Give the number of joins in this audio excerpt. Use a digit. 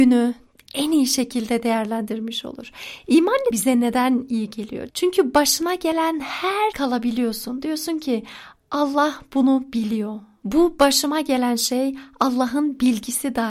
2